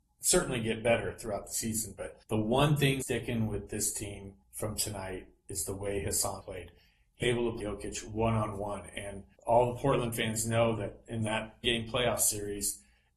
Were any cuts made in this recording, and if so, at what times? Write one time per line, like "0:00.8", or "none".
0:02.2
0:03.0
0:04.4
0:06.4
0:07.2
0:07.6
0:09.4
0:11.6